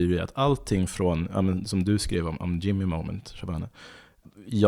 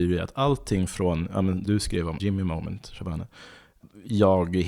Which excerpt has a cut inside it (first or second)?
second